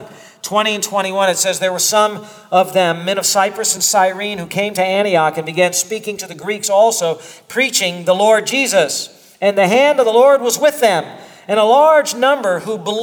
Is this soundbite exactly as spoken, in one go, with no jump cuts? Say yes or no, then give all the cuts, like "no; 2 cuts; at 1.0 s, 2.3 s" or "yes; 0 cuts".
yes; 0 cuts